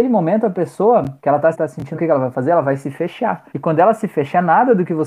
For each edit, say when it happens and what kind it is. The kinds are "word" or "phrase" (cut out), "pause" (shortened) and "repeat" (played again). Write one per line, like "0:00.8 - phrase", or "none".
0:01.2 - pause
0:01.5 - phrase
0:01.9 - word
0:03.5 - pause